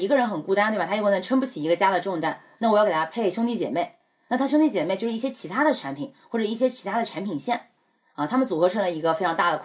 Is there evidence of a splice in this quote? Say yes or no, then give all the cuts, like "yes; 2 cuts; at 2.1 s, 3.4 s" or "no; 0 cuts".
no; 0 cuts